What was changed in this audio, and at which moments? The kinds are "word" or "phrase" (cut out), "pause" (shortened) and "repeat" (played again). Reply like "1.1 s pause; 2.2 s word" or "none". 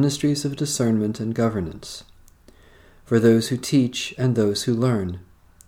none